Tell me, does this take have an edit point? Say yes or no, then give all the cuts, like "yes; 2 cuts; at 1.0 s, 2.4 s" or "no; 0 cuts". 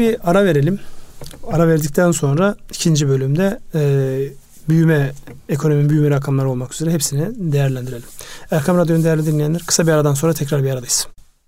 no; 0 cuts